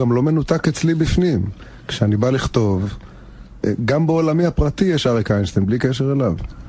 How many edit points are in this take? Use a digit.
0